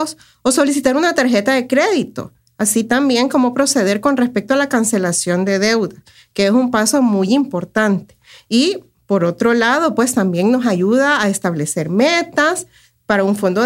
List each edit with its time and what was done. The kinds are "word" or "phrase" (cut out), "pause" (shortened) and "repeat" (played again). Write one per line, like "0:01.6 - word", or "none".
none